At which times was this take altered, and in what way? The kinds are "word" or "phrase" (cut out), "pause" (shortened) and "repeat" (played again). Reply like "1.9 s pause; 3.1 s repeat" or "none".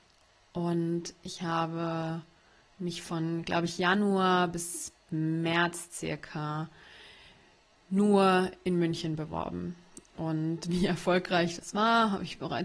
none